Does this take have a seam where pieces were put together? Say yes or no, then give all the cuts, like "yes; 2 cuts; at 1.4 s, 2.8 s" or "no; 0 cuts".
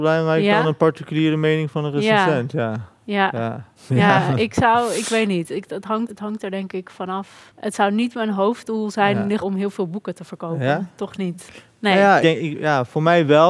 yes; 4 cuts; at 3.8 s, 6.1 s, 9.4 s, 12.2 s